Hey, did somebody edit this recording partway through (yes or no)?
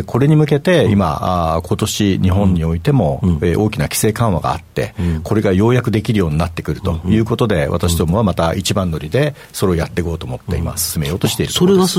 no